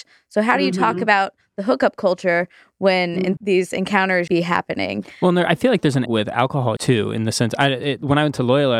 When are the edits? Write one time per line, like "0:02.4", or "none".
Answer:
0:03.4
0:04.3
0:06.1
0:06.8